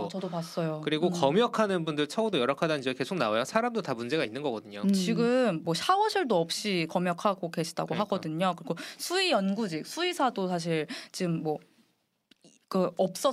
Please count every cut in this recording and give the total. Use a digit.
0